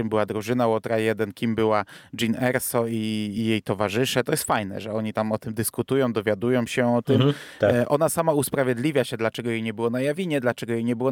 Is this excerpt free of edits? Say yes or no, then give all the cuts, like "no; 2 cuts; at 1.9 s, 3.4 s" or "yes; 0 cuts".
yes; 0 cuts